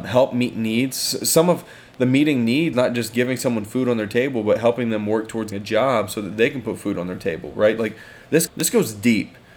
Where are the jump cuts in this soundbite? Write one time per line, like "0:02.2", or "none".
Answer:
0:02.7
0:05.5
0:08.5